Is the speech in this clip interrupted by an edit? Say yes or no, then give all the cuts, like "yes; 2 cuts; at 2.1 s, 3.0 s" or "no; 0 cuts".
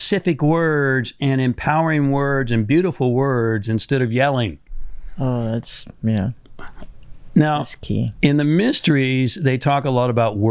no; 0 cuts